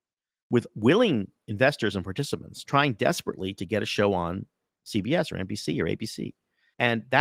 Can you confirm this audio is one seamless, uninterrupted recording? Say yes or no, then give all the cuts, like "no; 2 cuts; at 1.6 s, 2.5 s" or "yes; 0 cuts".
yes; 0 cuts